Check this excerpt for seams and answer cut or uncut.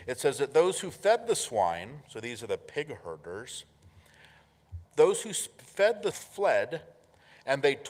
cut